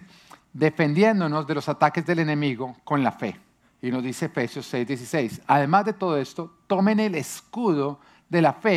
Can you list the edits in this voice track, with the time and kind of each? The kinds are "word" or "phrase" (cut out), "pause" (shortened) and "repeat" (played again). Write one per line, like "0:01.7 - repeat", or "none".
0:03.6 - pause